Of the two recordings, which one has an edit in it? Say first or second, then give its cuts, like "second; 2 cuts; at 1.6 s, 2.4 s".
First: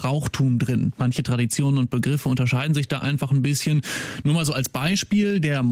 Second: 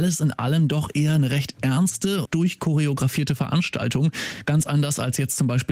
second; 1 cut; at 2.3 s